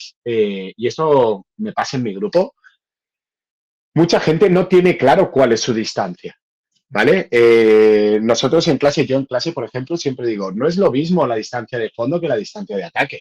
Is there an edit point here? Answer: no; 0 cuts

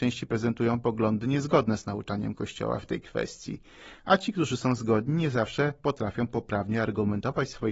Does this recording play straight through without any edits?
yes; 0 cuts

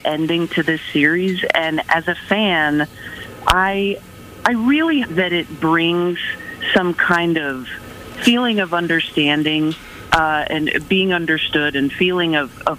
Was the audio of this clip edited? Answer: yes; 1 cut; at 5.0 s

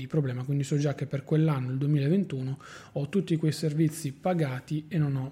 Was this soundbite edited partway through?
no; 0 cuts

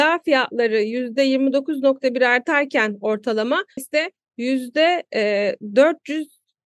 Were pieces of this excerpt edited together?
yes; 1 cut; at 3.8 s

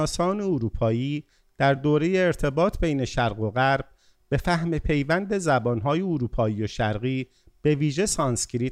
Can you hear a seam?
no; 0 cuts

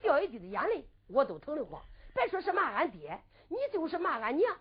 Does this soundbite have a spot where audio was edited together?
no; 0 cuts

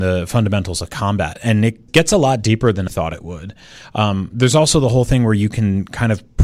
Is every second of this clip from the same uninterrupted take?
no; 2 cuts; at 1.9 s, 2.9 s

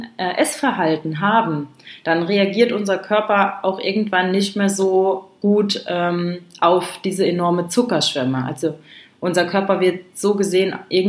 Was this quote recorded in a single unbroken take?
yes; 0 cuts

